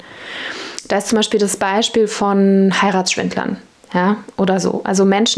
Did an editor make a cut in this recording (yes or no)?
no